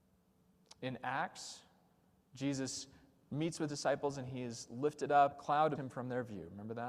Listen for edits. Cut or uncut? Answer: cut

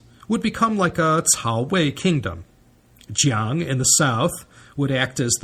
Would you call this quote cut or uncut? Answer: uncut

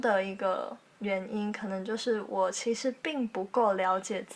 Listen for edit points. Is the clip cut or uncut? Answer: uncut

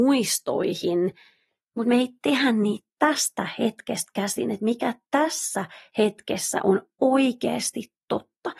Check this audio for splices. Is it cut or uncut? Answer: uncut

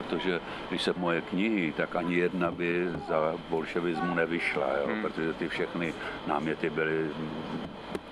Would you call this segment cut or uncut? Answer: cut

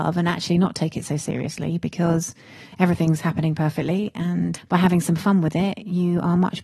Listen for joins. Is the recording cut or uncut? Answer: cut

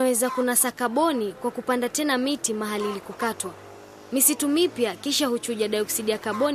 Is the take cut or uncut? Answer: uncut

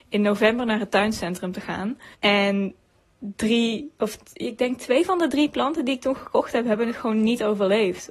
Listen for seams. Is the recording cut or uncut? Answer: cut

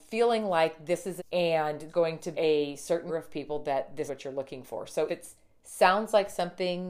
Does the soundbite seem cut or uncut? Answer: cut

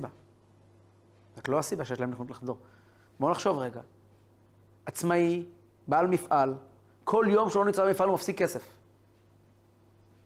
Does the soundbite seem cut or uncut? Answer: uncut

